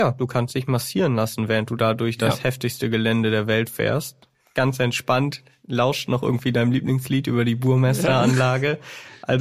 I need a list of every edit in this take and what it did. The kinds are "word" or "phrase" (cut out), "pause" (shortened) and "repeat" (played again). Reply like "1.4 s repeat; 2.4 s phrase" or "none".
none